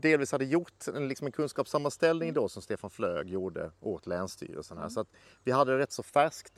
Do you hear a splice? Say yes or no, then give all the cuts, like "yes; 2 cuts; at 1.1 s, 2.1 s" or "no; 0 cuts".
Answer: no; 0 cuts